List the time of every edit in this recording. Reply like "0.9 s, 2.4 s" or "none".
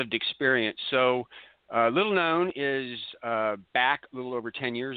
none